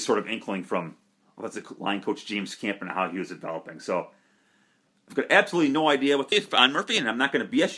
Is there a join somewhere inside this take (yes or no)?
yes